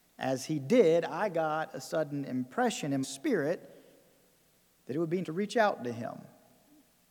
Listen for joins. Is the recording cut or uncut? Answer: cut